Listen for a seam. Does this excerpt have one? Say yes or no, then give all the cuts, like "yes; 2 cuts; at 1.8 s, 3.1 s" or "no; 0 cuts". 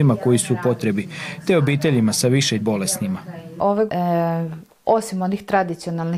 yes; 2 cuts; at 2.6 s, 3.9 s